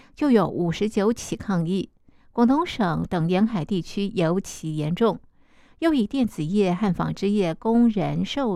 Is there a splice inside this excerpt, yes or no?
no